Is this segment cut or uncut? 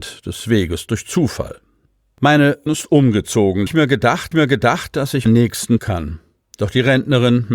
cut